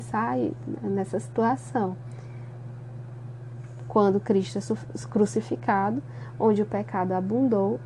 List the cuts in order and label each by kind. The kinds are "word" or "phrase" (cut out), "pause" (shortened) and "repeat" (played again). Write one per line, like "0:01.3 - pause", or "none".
none